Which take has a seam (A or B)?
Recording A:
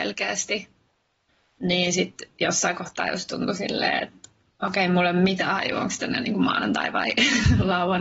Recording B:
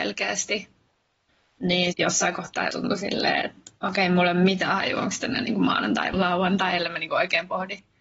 B